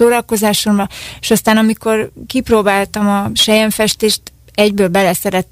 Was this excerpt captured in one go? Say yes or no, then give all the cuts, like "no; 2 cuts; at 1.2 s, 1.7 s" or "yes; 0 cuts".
yes; 0 cuts